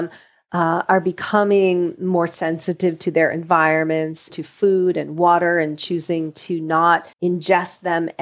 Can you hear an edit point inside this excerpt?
yes; 2 cuts; at 4.3 s, 7.1 s

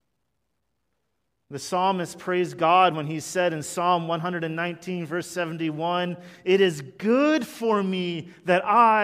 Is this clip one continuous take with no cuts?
yes; 0 cuts

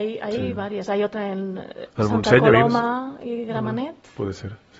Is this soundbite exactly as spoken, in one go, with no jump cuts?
yes; 0 cuts

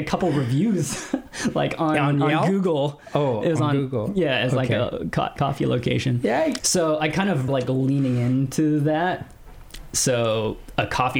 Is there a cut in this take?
yes; 2 cuts; at 6.6 s, 7.5 s

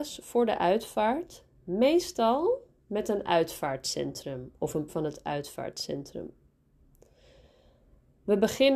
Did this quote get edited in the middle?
yes; 1 cut; at 4.9 s

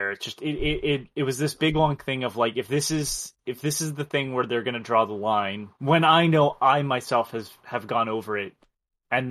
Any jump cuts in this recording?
yes; 1 cut; at 5.7 s

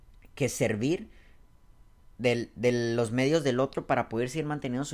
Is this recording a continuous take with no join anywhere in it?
yes; 0 cuts

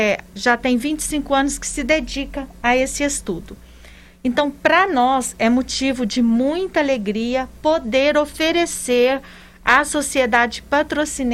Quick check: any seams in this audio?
no; 0 cuts

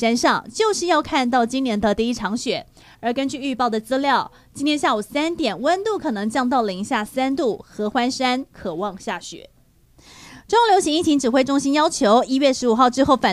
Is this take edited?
no; 0 cuts

